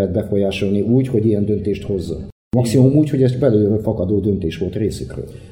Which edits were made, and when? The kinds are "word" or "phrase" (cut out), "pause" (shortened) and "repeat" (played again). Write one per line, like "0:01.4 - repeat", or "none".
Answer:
none